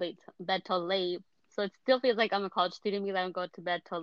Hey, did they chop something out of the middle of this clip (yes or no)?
no